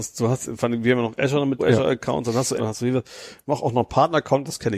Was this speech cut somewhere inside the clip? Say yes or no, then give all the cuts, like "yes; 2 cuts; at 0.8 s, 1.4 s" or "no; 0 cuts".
yes; 2 cuts; at 1.6 s, 2.6 s